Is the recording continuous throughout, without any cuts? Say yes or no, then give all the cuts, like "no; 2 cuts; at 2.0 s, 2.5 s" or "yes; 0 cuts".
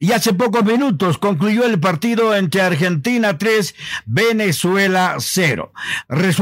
yes; 0 cuts